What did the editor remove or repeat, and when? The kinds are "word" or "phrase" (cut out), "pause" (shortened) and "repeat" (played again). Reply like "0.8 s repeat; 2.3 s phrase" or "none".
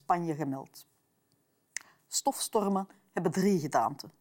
none